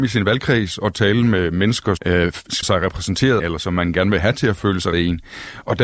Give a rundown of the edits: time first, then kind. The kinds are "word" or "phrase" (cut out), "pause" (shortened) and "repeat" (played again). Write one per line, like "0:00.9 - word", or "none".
0:02.0 - word
0:02.6 - word
0:03.4 - phrase
0:04.9 - word